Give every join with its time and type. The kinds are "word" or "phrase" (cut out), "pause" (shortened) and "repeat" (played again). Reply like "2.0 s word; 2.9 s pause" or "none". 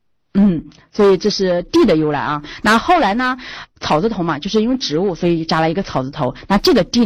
3.7 s pause